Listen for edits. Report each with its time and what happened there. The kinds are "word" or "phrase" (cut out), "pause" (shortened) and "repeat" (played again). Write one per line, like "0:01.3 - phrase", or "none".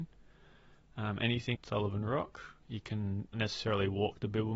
0:01.5 - word
0:02.6 - pause
0:03.3 - word